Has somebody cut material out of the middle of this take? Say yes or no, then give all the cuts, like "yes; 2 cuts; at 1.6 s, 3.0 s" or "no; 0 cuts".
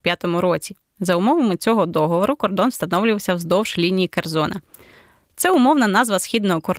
no; 0 cuts